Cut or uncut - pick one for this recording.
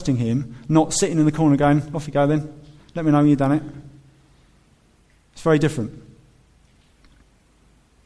uncut